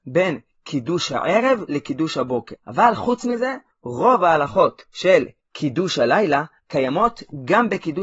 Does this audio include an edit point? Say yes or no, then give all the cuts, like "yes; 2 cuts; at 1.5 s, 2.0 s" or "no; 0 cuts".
no; 0 cuts